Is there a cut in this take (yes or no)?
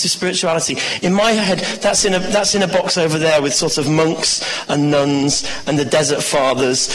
no